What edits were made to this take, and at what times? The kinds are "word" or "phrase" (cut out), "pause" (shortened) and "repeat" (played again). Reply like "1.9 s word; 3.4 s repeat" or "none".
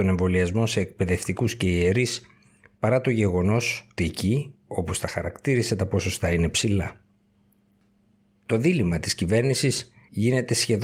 4.0 s word